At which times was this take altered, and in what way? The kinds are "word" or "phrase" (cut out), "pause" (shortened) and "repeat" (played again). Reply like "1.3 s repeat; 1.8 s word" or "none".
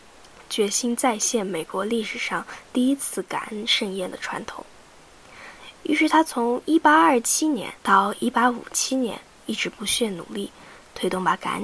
7.8 s pause